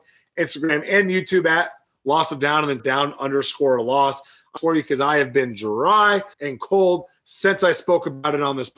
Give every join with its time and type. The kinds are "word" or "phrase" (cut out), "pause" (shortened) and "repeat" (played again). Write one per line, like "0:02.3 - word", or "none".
0:02.8 - word
0:04.6 - phrase
0:06.3 - pause